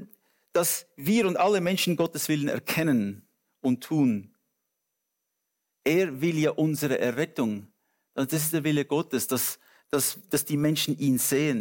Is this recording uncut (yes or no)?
yes